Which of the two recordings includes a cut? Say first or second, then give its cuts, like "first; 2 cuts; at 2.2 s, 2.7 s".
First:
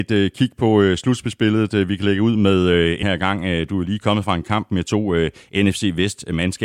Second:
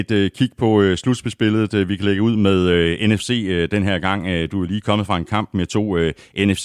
first; 1 cut; at 3.0 s